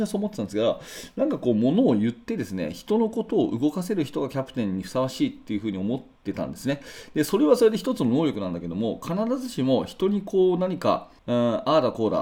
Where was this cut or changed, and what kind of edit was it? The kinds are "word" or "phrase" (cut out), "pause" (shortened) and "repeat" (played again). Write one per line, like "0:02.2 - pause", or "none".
0:11.2 - pause